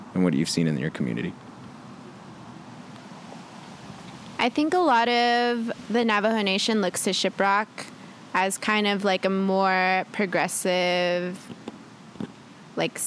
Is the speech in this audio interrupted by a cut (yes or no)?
no